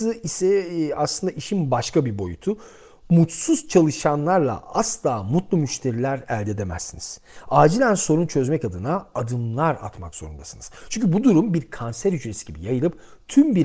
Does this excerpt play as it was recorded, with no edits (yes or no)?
yes